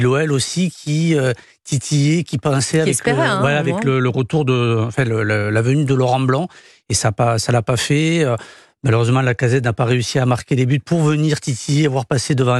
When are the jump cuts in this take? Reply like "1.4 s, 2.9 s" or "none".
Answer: none

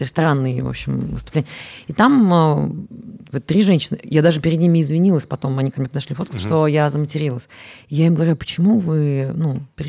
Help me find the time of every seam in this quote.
none

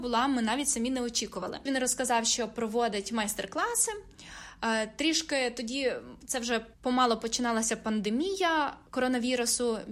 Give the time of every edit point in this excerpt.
6.7 s, 8.9 s

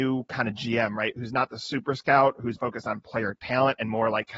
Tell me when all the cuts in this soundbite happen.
2.6 s

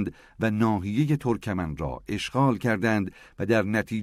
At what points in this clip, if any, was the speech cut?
none

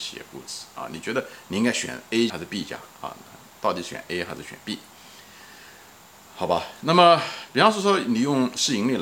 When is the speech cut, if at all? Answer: 2.3 s

